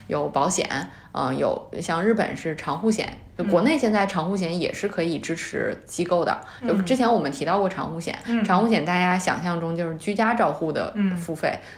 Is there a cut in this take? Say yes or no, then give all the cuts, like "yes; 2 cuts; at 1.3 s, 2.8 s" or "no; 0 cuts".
no; 0 cuts